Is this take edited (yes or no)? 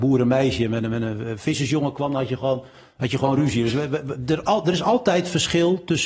no